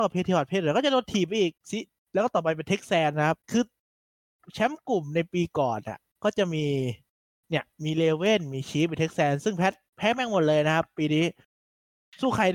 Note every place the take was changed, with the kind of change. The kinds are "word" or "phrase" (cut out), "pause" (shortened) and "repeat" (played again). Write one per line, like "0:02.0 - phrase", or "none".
0:01.6 - pause
0:03.4 - pause
0:07.7 - pause

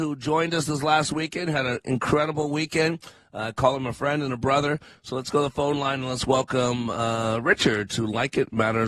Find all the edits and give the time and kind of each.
none

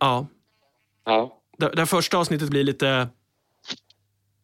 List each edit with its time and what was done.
0:02.5 - word

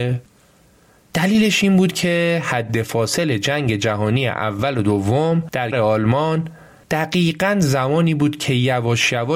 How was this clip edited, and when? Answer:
0:05.7 - word

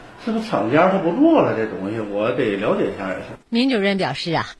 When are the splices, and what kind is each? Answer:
0:03.4 - pause

